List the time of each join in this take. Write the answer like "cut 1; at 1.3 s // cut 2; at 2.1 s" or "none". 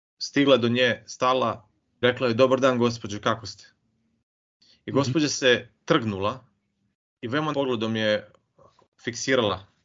cut 1; at 2.0 s // cut 2; at 7.5 s